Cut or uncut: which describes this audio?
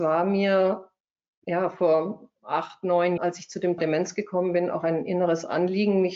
cut